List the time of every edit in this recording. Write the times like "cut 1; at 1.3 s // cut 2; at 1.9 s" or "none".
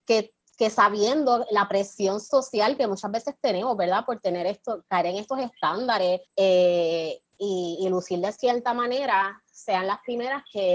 cut 1; at 6.3 s